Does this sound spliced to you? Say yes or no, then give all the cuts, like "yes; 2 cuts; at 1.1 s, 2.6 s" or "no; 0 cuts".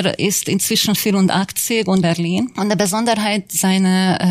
yes; 2 cuts; at 1.0 s, 2.0 s